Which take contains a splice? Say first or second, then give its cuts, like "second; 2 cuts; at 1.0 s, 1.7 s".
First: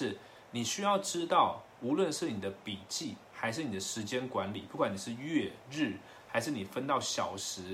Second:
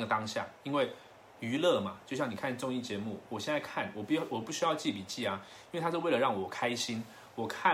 first; 1 cut; at 5.6 s